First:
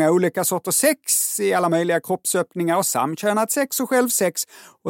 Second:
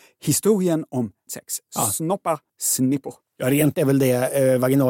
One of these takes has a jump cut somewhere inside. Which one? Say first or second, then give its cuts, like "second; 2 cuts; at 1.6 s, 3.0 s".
second; 3 cuts; at 1.3 s, 2.5 s, 3.7 s